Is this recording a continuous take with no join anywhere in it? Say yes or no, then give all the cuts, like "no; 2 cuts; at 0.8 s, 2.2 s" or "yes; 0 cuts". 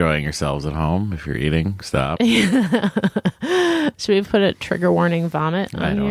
yes; 0 cuts